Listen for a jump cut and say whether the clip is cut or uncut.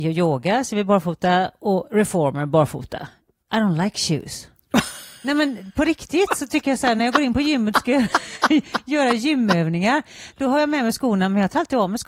uncut